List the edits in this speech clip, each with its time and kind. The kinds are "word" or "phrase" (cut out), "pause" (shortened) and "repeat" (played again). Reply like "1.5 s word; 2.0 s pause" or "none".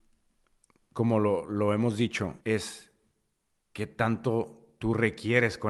2.4 s pause